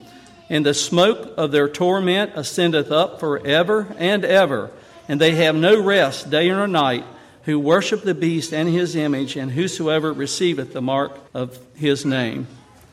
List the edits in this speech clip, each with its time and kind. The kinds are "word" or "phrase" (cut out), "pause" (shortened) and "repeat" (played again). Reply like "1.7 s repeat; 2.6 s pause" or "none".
11.3 s pause